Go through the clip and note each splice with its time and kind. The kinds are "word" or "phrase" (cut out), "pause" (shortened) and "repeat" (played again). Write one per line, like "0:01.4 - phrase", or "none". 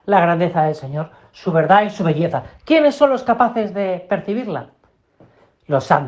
none